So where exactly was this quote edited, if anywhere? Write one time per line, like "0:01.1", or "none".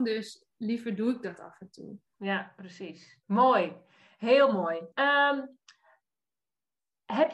0:02.1
0:03.2
0:04.9